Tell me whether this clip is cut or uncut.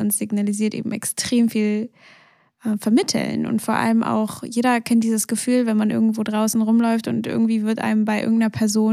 uncut